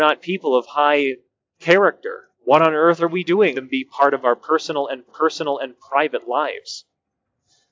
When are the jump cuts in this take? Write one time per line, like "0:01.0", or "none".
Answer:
0:02.3
0:03.5
0:05.1